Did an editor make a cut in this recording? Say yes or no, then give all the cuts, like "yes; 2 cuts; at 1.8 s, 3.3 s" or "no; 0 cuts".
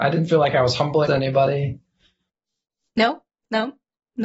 yes; 1 cut; at 1.1 s